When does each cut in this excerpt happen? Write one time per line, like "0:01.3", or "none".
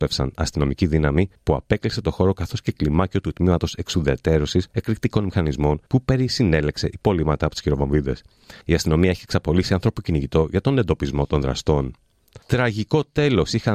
0:01.4
0:04.7
0:05.9
0:08.6
0:12.4